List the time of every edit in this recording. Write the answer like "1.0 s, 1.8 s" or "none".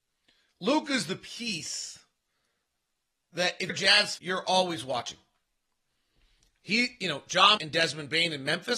3.7 s, 4.2 s, 7.6 s